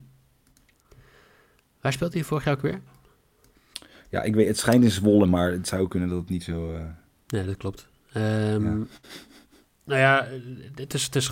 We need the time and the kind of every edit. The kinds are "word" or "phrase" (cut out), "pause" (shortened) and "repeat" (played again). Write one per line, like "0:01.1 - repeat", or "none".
none